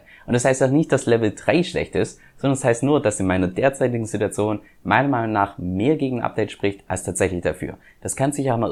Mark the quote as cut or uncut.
uncut